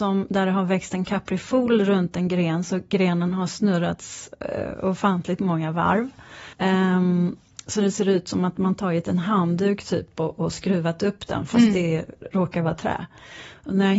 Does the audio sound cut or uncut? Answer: cut